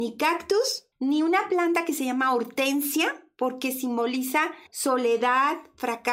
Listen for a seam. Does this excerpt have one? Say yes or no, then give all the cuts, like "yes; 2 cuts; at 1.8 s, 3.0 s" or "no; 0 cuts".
yes; 2 cuts; at 0.9 s, 4.7 s